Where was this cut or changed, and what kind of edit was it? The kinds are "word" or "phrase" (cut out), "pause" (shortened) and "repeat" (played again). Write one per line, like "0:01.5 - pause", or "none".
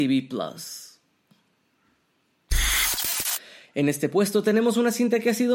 none